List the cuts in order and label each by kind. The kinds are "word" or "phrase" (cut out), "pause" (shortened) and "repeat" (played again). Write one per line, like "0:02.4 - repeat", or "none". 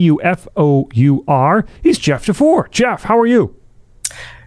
0:01.8 - pause